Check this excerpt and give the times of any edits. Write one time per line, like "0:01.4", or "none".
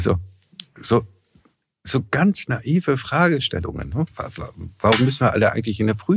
0:04.1